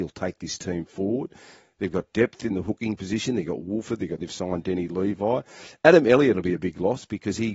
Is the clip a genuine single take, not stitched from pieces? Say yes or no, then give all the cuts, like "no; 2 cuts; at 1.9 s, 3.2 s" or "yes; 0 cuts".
no; 1 cut; at 4.2 s